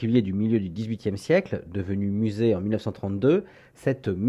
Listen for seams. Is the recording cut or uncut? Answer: uncut